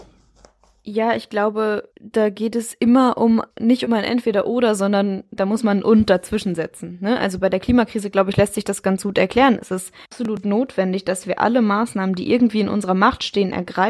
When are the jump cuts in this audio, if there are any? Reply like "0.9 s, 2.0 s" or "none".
1.9 s, 10.0 s